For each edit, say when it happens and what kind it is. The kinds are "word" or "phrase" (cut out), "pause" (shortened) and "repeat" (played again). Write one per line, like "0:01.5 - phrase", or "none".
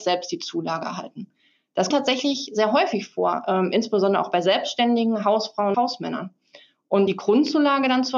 0:01.9 - word
0:05.7 - word
0:07.1 - word